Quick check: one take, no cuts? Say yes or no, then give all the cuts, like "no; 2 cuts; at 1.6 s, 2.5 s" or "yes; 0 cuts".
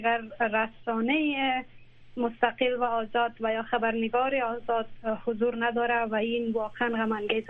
yes; 0 cuts